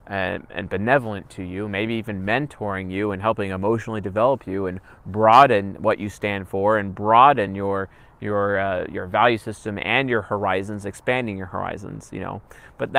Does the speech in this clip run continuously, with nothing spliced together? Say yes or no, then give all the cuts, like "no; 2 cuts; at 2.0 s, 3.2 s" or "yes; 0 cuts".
yes; 0 cuts